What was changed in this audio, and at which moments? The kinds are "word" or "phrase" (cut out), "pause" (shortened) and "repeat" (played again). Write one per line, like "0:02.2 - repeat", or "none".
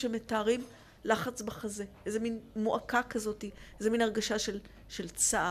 none